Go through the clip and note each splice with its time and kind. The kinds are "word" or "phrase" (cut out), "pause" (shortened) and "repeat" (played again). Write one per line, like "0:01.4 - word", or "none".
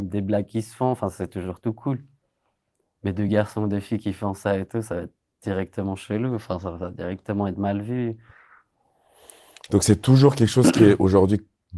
none